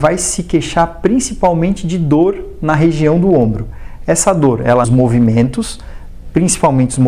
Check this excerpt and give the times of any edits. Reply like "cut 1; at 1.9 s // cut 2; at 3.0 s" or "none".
cut 1; at 4.8 s